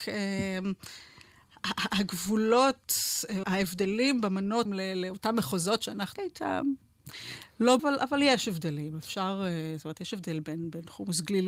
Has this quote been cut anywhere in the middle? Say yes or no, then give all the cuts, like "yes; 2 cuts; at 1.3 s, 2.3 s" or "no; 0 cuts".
yes; 4 cuts; at 3.4 s, 4.7 s, 6.2 s, 7.8 s